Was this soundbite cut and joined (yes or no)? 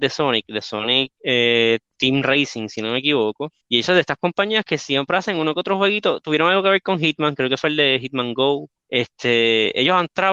yes